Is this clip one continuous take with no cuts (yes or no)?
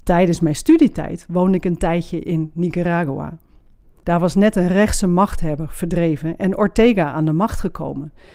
yes